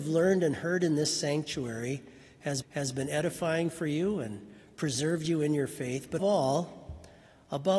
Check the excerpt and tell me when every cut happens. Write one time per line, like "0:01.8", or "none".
0:02.6
0:06.2